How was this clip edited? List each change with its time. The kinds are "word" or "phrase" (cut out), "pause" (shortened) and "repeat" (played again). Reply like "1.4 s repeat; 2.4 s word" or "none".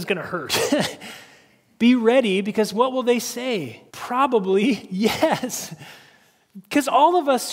3.9 s pause